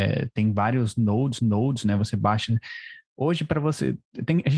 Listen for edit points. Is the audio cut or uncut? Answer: cut